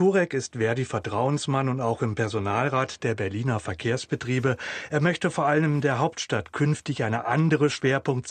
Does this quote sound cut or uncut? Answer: uncut